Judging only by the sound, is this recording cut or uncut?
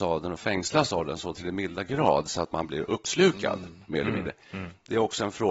uncut